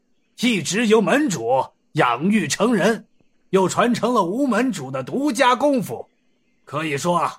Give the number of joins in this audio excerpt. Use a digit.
0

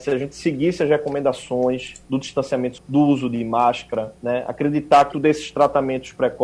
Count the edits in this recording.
4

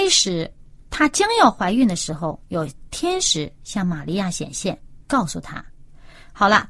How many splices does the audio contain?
0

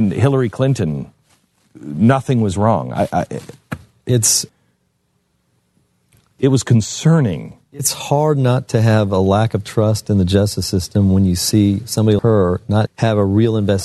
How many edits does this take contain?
2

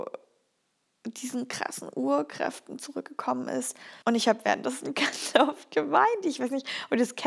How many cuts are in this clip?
1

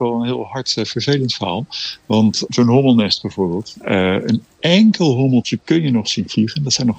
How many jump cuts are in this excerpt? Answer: 0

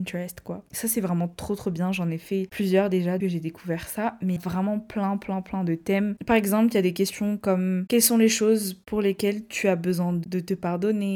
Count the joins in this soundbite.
2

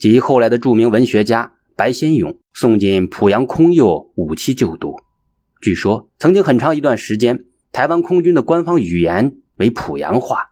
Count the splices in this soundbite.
1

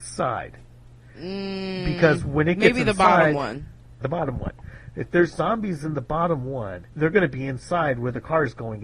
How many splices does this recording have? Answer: 2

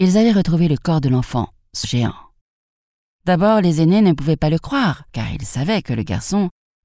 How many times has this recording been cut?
2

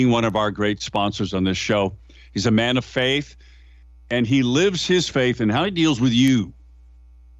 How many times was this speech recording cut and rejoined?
0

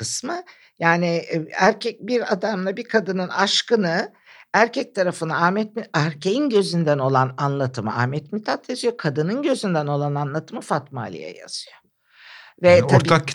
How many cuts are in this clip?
0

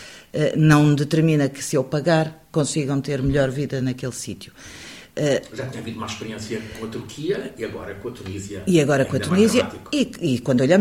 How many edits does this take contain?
0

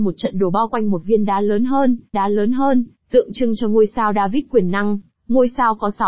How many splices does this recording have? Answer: 1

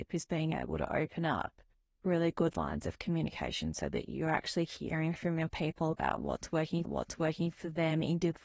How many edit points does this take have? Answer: 2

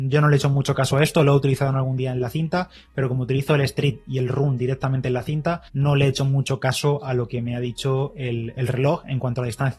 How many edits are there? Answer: 1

